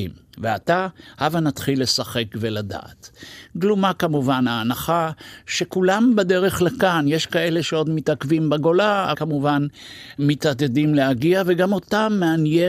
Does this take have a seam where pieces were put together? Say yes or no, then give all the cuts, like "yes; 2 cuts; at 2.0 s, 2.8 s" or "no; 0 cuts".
yes; 1 cut; at 9.1 s